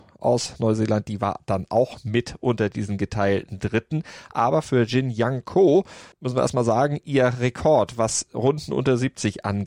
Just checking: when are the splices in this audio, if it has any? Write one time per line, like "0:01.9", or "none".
0:06.1